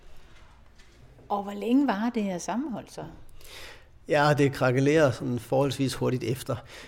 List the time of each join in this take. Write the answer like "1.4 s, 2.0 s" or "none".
none

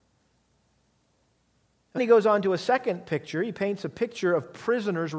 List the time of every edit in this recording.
2.0 s

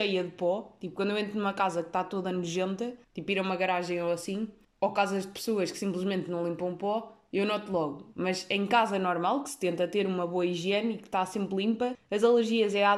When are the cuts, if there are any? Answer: 3.0 s

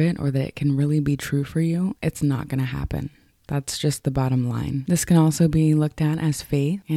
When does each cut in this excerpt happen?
none

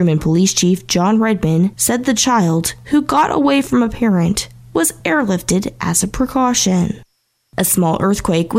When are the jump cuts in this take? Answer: none

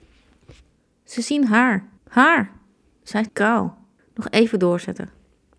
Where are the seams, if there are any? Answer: 2.0 s, 3.3 s, 4.0 s

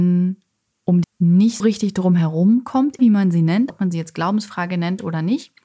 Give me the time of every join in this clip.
1.0 s, 1.6 s, 3.0 s, 3.7 s

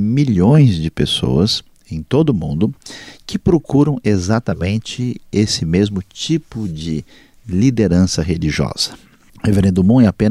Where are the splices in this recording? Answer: none

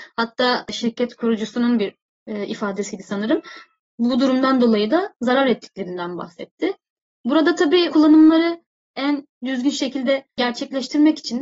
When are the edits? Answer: 7.9 s

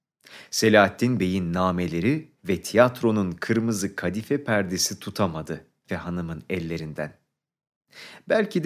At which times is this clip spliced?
2.4 s, 5.9 s

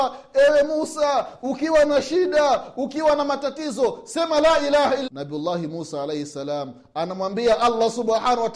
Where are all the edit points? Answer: 5.1 s

